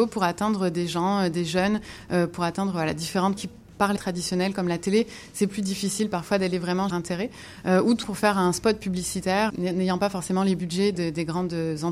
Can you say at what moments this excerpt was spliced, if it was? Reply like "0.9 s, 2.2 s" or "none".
3.4 s, 4.0 s, 6.9 s, 8.0 s, 9.5 s